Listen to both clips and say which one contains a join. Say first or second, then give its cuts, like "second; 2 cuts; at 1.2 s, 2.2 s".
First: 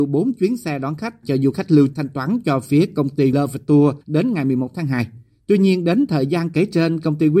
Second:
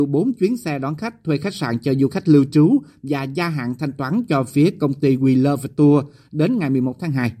first; 4 cuts; at 1.2 s, 1.9 s, 3.3 s, 4.0 s